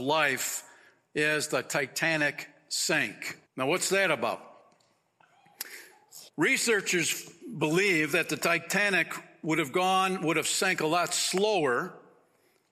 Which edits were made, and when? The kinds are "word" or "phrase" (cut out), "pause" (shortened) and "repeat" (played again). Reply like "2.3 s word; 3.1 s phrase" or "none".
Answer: 3.5 s pause; 6.3 s pause